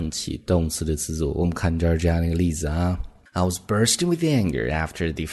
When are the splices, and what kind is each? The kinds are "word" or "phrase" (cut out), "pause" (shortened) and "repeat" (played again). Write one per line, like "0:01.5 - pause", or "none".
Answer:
none